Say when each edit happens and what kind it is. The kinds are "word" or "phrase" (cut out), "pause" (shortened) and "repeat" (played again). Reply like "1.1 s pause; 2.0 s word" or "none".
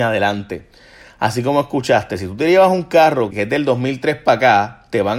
3.3 s word